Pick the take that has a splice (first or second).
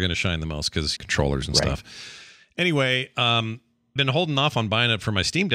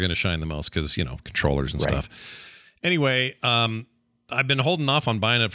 first